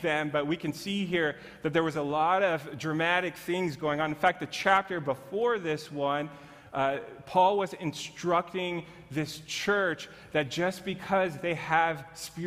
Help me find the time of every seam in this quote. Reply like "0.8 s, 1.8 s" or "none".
none